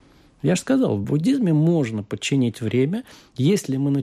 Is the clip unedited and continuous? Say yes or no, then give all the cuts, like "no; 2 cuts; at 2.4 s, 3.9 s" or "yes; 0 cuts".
yes; 0 cuts